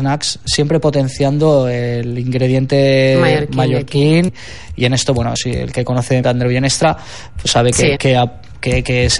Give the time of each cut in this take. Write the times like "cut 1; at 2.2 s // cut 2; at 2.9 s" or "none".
cut 1; at 4.3 s // cut 2; at 5.4 s // cut 3; at 6.2 s // cut 4; at 8.0 s